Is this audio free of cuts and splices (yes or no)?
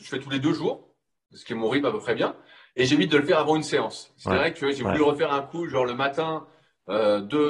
yes